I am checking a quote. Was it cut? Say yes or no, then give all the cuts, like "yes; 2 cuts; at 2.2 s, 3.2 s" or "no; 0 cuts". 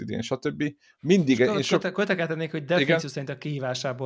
no; 0 cuts